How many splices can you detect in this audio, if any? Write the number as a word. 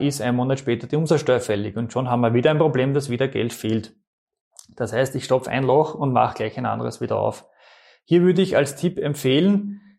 zero